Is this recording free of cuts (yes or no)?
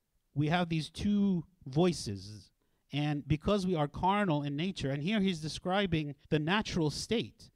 no